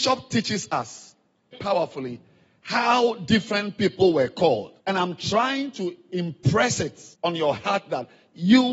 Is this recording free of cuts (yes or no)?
no